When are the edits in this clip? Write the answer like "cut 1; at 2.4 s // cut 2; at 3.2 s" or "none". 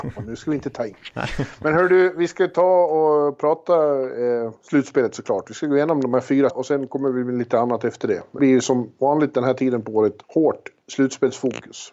cut 1; at 4.6 s // cut 2; at 6.5 s // cut 3; at 8.4 s // cut 4; at 10.2 s